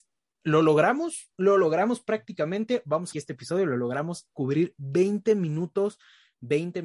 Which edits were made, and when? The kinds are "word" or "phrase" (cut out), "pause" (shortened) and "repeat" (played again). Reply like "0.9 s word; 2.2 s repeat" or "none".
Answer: 3.1 s phrase